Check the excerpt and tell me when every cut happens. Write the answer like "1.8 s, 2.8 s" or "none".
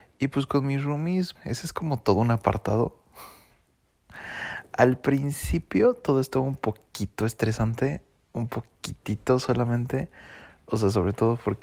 1.4 s